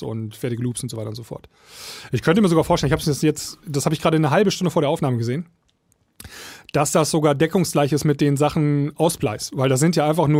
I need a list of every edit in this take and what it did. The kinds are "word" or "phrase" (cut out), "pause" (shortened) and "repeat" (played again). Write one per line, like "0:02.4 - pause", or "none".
none